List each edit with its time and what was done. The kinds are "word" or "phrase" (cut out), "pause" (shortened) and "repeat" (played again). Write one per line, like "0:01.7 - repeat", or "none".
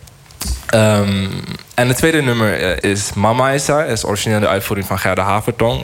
0:02.8 - word